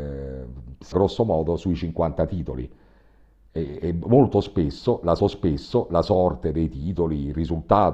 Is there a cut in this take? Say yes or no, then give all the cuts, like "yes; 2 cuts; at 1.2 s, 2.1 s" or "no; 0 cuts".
yes; 2 cuts; at 0.9 s, 5.2 s